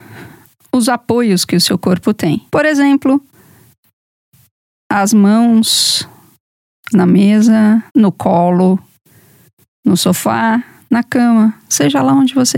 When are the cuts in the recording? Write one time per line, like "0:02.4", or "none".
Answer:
0:02.5
0:06.9
0:07.9